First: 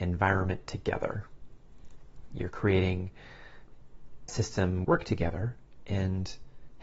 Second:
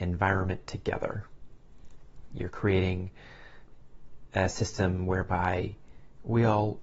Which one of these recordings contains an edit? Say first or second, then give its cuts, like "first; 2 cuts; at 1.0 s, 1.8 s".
first; 2 cuts; at 4.3 s, 4.8 s